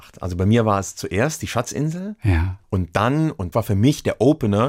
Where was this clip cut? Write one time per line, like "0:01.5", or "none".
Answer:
0:02.6
0:03.5